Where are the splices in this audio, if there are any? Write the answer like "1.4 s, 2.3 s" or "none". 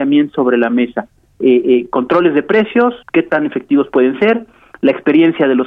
3.0 s